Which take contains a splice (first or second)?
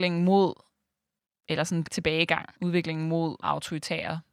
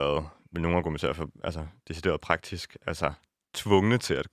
first